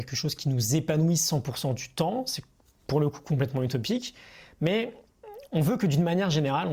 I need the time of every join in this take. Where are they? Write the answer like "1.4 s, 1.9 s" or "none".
none

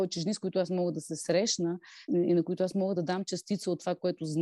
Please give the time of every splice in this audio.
2.1 s

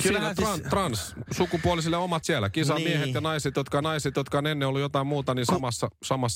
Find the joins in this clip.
1.3 s, 2.2 s, 3.8 s

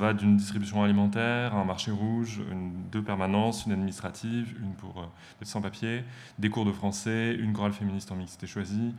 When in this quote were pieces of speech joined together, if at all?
5.4 s

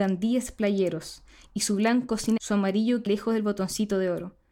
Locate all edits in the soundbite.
2.4 s, 3.1 s

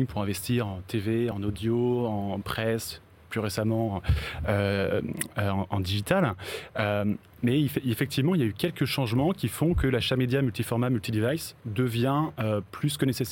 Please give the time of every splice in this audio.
none

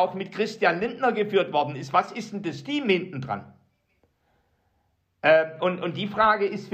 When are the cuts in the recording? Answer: none

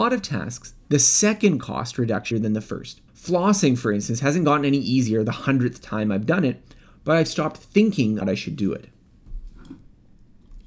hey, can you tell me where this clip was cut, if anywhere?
2.3 s, 3.1 s, 8.2 s

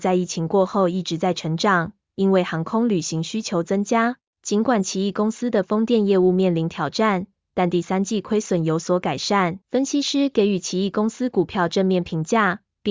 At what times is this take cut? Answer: 4.3 s, 9.6 s

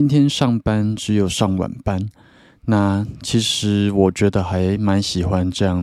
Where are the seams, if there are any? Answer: none

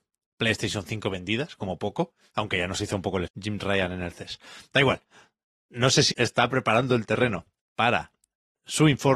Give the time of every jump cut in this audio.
3.3 s, 6.1 s

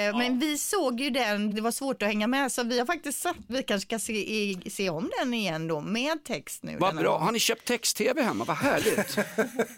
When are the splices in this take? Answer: 1.5 s, 3.5 s

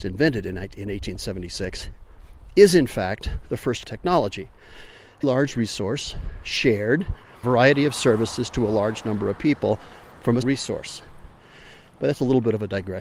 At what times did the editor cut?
3.8 s, 5.2 s, 7.4 s, 10.4 s

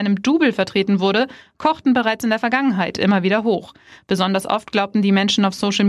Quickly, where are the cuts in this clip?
none

